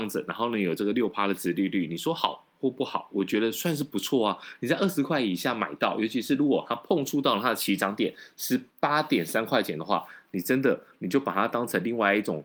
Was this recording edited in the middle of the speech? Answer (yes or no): yes